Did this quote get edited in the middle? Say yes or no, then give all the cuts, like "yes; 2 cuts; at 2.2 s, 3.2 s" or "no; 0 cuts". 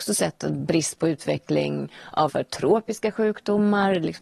yes; 1 cut; at 2.3 s